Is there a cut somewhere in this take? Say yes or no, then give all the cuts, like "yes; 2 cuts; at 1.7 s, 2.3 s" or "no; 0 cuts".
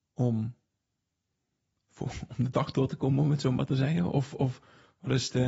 no; 0 cuts